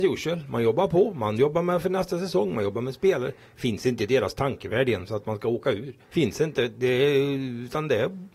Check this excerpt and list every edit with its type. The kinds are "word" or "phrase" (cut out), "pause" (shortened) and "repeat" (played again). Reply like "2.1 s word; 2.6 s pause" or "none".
6.0 s pause